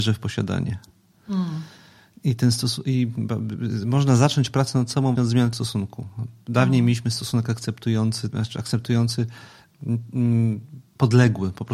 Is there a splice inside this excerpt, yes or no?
yes